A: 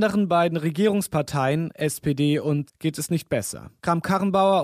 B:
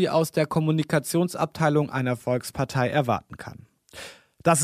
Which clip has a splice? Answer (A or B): A